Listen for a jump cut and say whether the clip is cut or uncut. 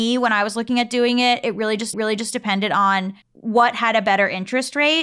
cut